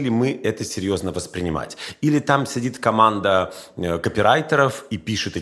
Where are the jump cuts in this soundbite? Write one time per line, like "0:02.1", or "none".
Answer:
none